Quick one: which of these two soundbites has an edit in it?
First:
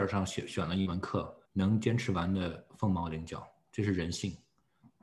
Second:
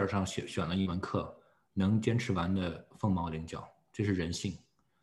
first; 1 cut; at 1.5 s

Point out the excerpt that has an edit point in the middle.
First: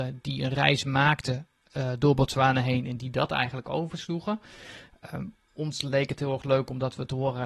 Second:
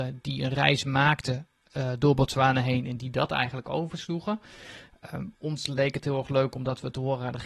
second; 1 cut; at 5.3 s

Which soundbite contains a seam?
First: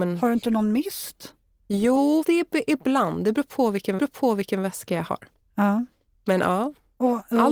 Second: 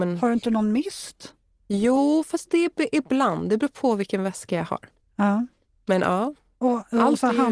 first; 2 cuts; at 2.2 s, 4.0 s

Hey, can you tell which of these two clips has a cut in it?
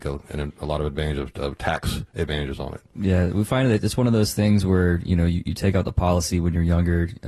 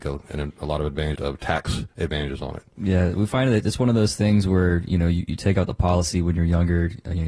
second; 1 cut; at 1.2 s

